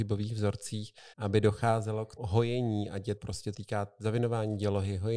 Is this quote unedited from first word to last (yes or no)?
no